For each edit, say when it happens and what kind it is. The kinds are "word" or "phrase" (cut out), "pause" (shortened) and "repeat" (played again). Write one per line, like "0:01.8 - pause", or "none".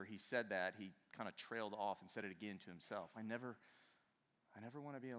none